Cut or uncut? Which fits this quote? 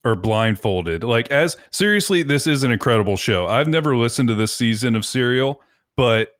cut